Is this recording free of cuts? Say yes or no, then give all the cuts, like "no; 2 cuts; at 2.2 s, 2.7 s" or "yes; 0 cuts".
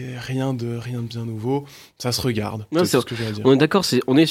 yes; 0 cuts